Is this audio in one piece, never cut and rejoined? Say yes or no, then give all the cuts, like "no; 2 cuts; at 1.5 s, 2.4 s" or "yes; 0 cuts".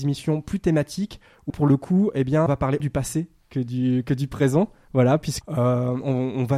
no; 4 cuts; at 1.5 s, 2.5 s, 2.8 s, 5.4 s